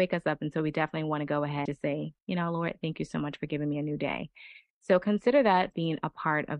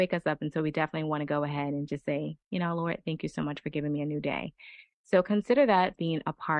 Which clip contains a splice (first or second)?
first